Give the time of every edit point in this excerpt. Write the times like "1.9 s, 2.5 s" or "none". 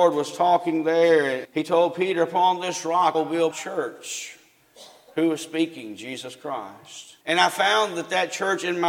1.4 s, 3.1 s, 3.5 s, 7.2 s